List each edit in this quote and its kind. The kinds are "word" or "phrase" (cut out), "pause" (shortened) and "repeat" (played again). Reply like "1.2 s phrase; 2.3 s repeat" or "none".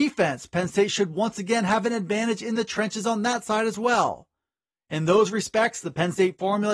none

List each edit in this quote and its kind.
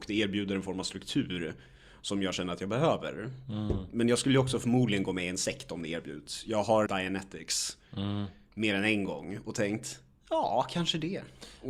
6.9 s word

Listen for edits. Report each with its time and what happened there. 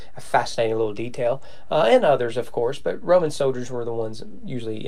none

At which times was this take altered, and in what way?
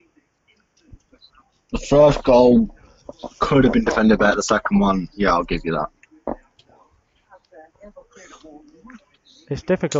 none

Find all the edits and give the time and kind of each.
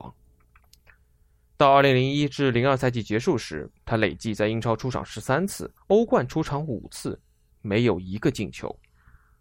3.8 s pause; 5.8 s pause

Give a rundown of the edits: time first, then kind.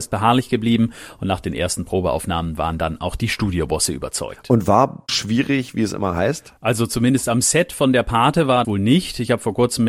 5.1 s phrase; 8.6 s word

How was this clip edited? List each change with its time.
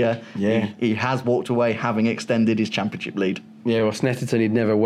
none

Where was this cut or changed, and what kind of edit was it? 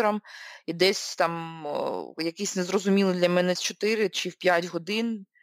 3.6 s word

